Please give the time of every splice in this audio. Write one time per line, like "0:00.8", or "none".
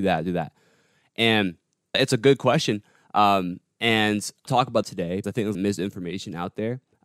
0:01.9
0:04.5
0:04.8
0:05.2
0:05.5